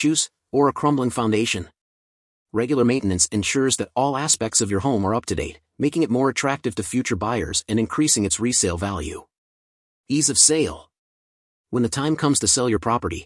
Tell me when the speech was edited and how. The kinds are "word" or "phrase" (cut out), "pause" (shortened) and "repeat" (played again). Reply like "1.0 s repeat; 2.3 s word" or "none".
none